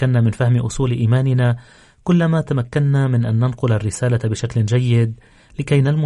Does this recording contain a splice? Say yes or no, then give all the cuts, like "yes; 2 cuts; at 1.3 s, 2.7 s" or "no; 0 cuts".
no; 0 cuts